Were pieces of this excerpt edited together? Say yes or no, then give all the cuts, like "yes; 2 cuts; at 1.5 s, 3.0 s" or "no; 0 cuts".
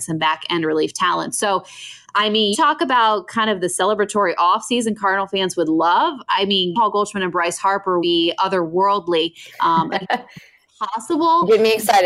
yes; 3 cuts; at 2.5 s, 6.7 s, 8.0 s